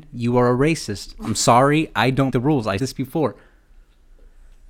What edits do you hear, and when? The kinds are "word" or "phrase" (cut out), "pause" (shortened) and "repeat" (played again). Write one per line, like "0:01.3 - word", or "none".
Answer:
0:02.3 - word
0:02.8 - word

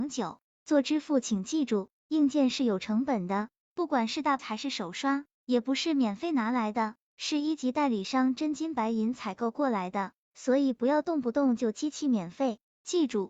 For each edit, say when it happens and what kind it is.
0:04.4 - word

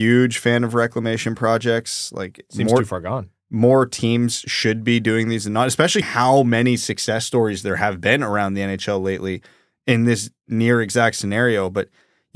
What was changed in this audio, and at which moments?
0:06.0 - word

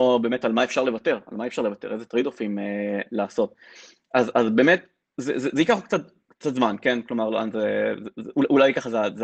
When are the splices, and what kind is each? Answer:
0:05.0 - pause

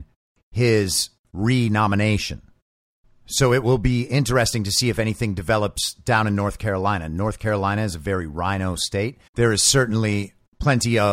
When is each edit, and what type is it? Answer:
0:01.2 - pause
0:09.3 - pause

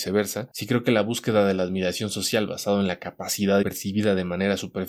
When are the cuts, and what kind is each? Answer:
0:03.6 - word

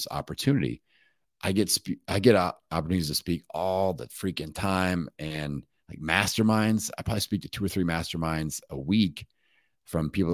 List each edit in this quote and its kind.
none

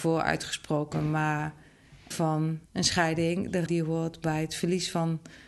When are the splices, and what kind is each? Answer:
0:02.1 - phrase
0:02.7 - pause
0:03.7 - word

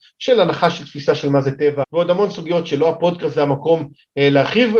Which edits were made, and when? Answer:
0:01.8 - word

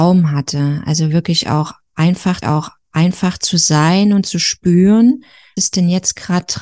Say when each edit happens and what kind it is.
0:02.4 - repeat
0:05.6 - word

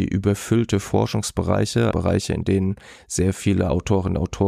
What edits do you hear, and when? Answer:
0:01.9 - word

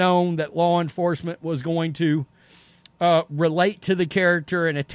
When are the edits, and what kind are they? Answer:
none

